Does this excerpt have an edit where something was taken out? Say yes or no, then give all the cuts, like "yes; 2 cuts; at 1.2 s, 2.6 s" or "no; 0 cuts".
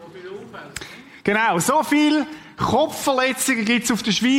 no; 0 cuts